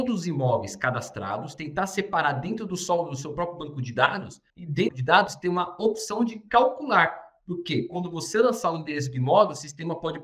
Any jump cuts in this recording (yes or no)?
yes